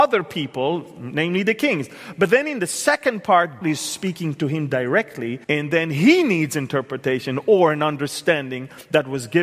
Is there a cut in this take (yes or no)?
yes